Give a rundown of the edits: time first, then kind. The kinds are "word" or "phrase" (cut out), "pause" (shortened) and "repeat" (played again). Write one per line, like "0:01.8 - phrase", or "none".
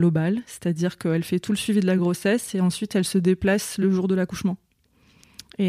none